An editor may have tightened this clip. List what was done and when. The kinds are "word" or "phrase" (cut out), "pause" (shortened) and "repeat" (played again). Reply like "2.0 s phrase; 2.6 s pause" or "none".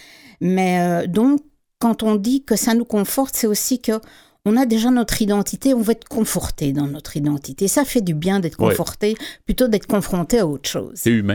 none

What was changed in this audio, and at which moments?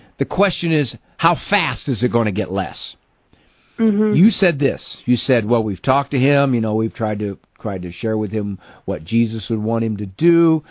none

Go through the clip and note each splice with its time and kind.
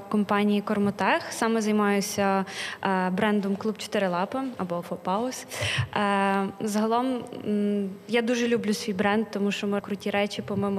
4.8 s word; 9.8 s word

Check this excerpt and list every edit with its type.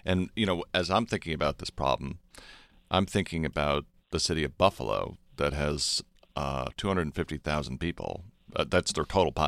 none

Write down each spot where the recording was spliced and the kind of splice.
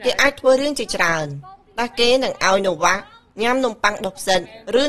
none

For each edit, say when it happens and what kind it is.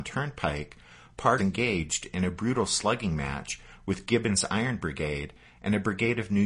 1.4 s phrase

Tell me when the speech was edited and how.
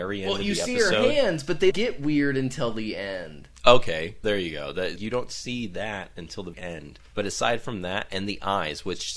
1.7 s word; 4.2 s word; 5.0 s word; 6.5 s word; 7.1 s pause

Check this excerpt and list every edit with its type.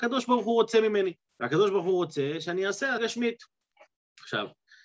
1.3 s pause; 3.0 s word

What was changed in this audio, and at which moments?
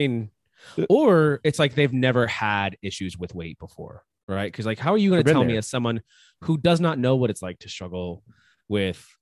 none

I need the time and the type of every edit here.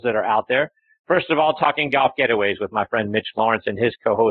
none

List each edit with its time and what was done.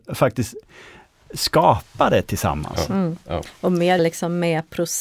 4.0 s word

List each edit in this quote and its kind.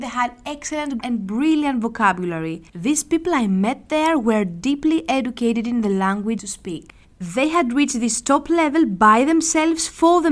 1.0 s word; 2.7 s pause; 6.4 s phrase; 7.0 s pause

